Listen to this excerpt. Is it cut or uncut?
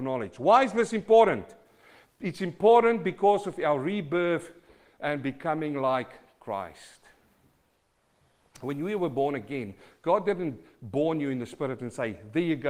uncut